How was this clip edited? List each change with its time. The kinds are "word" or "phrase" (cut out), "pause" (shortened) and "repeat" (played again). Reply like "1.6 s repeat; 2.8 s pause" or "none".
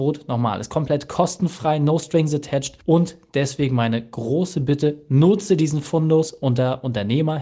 2.8 s pause